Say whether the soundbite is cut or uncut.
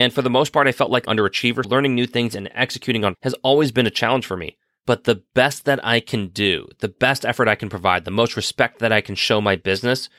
cut